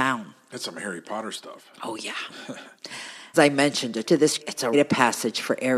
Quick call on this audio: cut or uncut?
cut